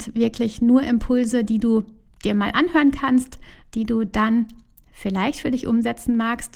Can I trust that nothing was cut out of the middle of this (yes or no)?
yes